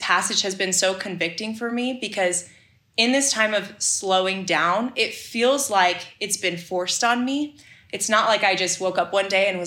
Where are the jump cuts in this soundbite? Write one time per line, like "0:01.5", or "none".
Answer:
none